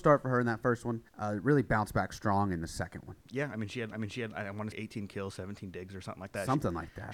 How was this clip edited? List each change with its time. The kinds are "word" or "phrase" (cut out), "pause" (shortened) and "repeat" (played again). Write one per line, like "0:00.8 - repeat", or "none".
0:01.1 - pause
0:03.2 - pause
0:03.9 - repeat
0:04.7 - word